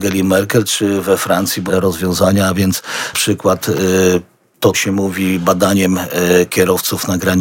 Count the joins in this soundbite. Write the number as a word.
three